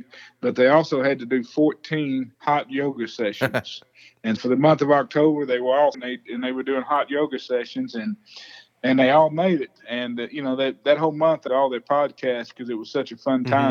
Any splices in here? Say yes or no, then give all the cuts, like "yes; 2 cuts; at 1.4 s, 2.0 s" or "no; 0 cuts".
yes; 4 cuts; at 2.3 s, 4.4 s, 5.9 s, 11.5 s